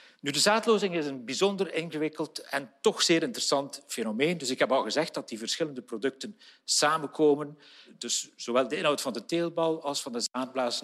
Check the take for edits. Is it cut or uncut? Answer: uncut